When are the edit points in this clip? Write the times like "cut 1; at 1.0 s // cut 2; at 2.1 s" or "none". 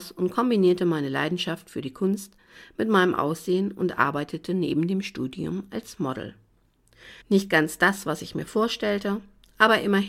cut 1; at 7.2 s